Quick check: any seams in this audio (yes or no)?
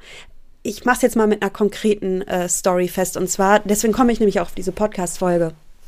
no